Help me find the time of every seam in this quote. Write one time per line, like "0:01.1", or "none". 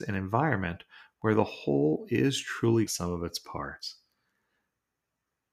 0:02.9